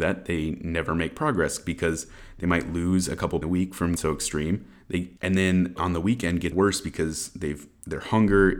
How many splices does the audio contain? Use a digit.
5